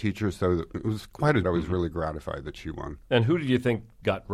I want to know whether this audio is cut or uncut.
cut